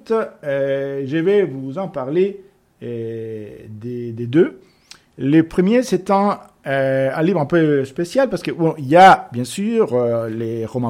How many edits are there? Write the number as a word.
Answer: zero